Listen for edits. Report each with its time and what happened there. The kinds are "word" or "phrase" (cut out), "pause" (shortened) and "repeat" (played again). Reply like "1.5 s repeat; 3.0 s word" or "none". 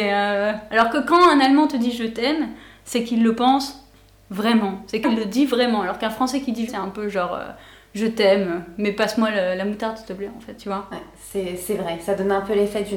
5.0 s word; 6.7 s word; 10.6 s word